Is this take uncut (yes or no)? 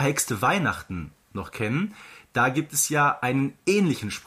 yes